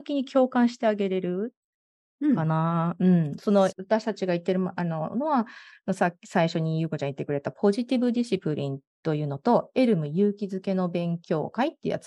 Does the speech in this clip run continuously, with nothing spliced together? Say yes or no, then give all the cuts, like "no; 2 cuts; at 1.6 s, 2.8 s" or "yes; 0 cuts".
no; 1 cut; at 3.7 s